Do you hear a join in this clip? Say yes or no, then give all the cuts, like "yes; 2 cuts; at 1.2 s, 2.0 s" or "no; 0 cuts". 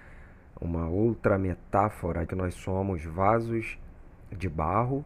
yes; 1 cut; at 2.3 s